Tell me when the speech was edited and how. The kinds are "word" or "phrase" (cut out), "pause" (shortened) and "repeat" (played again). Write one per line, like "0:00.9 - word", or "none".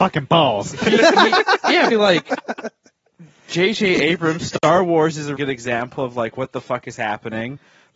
0:01.9 - word
0:05.4 - word

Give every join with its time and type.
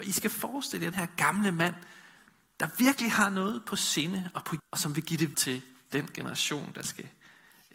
0:00.9 - word
0:04.6 - word
0:05.3 - word

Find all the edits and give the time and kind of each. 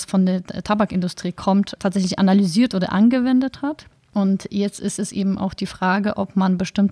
none

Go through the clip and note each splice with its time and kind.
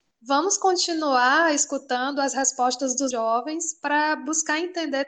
0:03.1 - word

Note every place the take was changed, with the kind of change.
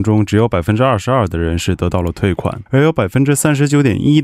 0:02.7 - pause

